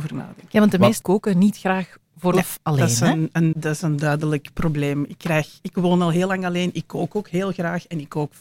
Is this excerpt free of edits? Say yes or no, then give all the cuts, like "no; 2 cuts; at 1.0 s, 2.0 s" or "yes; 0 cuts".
no; 3 cuts; at 1.0 s, 2.3 s, 3.5 s